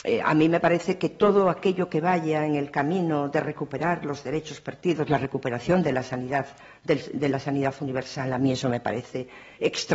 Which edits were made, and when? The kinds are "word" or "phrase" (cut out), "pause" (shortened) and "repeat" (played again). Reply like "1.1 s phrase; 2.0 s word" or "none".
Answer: none

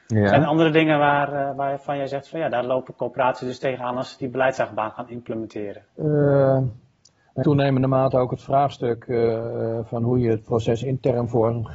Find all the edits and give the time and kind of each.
5.9 s pause; 7.4 s word

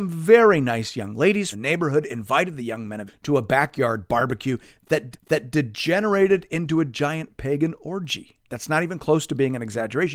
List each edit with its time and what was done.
1.5 s word; 3.1 s word; 5.1 s repeat; 8.4 s pause

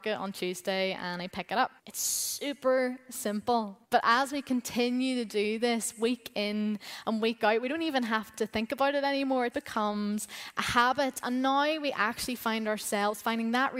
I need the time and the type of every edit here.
1.8 s pause; 3.8 s pause; 9.5 s word

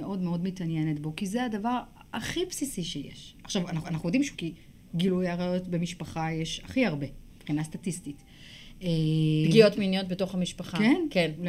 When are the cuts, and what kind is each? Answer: 3.8 s repeat; 4.3 s phrase; 7.3 s pause

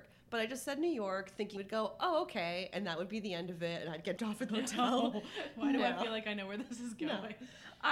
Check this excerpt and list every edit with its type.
1.6 s word; 4.2 s word; 4.5 s word

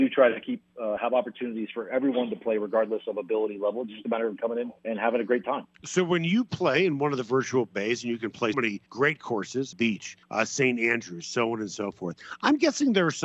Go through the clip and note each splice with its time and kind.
4.4 s word; 4.8 s pause; 5.7 s pause; 8.5 s word; 8.9 s pause; 9.7 s phrase; 10.2 s pause

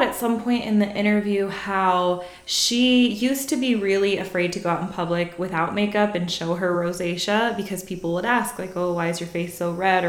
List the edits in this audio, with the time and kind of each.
none

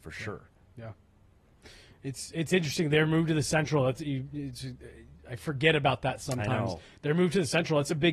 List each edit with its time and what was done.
none

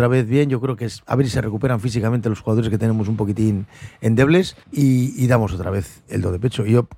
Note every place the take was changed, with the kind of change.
4.6 s pause

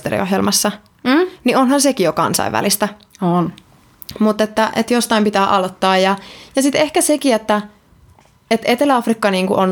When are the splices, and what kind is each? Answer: none

